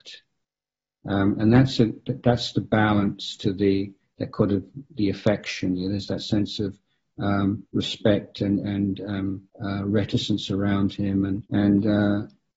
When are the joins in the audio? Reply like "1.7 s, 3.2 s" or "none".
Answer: 7.7 s, 9.5 s, 11.5 s